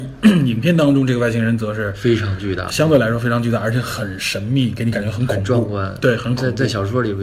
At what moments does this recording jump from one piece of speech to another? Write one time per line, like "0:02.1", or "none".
0:02.7